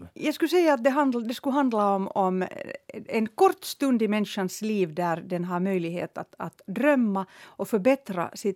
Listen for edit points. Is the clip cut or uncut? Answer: uncut